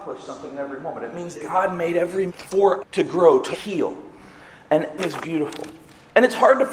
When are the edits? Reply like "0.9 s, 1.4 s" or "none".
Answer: 1.3 s, 2.3 s, 2.8 s, 3.5 s, 5.0 s